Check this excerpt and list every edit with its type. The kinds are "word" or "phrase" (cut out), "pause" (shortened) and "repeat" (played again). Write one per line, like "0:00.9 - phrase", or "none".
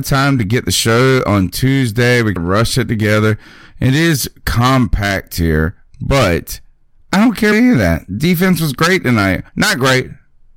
0:02.4 - word
0:07.5 - word
0:09.5 - pause